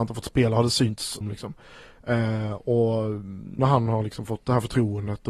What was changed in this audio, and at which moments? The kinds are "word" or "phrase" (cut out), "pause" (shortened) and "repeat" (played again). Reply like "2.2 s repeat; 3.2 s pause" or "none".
1.2 s word; 3.6 s word